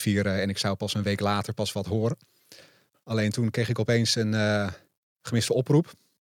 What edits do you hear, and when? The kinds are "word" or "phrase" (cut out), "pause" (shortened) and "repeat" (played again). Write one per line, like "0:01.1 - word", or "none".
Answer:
none

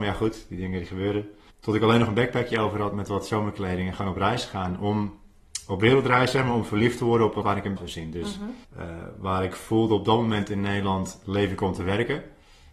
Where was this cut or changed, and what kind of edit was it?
0:01.5 - pause
0:07.4 - word
0:07.8 - phrase
0:08.6 - pause

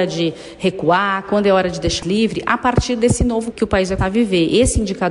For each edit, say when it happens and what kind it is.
0:02.0 - word
0:03.5 - word
0:04.0 - word

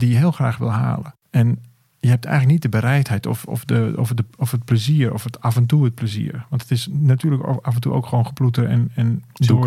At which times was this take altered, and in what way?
none

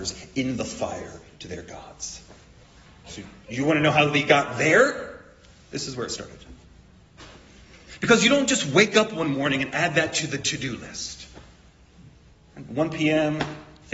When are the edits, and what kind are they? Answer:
0:02.6 - pause

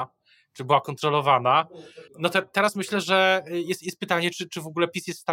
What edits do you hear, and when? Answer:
0:02.1 - pause

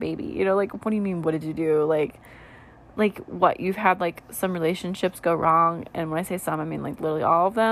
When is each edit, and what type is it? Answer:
none

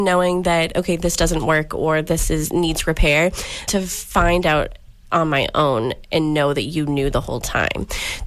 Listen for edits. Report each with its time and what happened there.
0:03.7 - word

